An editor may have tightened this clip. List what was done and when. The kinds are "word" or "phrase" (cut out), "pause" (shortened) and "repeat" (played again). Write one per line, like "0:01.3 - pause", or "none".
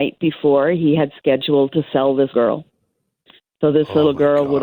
0:02.3 - word